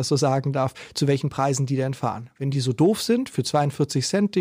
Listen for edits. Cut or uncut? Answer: uncut